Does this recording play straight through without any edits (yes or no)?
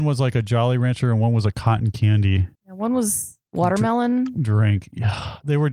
no